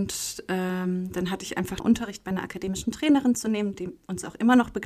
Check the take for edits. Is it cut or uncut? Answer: cut